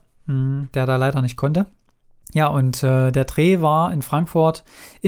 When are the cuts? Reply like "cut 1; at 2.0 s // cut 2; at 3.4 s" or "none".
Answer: cut 1; at 2.0 s